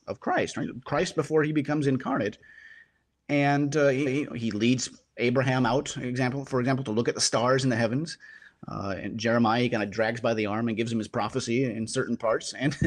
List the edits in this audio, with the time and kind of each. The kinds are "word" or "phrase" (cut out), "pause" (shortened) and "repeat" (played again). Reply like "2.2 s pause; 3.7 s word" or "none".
4.1 s repeat